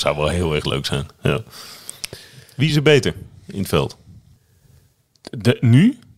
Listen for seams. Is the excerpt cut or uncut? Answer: uncut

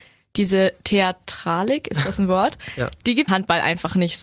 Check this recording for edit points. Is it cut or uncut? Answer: cut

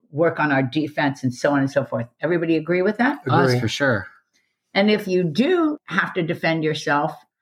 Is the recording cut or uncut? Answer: uncut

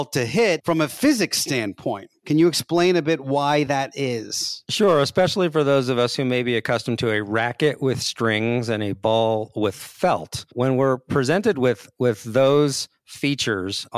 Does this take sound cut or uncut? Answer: uncut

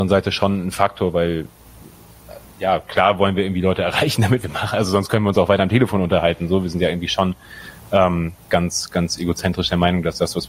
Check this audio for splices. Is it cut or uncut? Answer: uncut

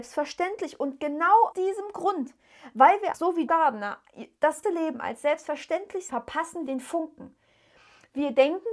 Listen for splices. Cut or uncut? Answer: cut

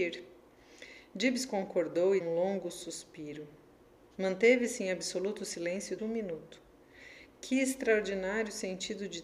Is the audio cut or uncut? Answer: cut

